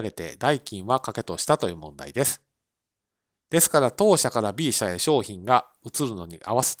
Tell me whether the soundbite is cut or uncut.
uncut